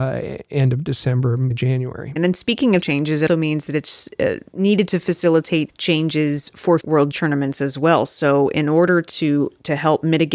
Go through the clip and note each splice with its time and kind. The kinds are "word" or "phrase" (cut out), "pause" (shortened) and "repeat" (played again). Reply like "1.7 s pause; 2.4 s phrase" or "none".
1.5 s word; 2.2 s word; 2.8 s word; 3.3 s word; 4.5 s word; 5.7 s word; 6.8 s word; 7.1 s word